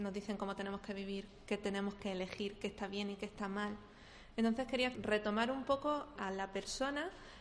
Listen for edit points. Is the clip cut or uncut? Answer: cut